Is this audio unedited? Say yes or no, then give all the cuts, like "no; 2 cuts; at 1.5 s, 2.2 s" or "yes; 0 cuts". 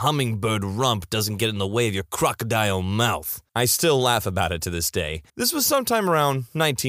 no; 2 cuts; at 3.5 s, 5.3 s